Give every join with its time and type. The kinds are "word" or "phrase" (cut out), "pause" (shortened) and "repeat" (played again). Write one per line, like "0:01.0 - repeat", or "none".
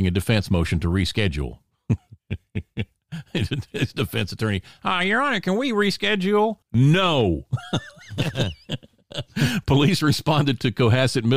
0:06.6 - pause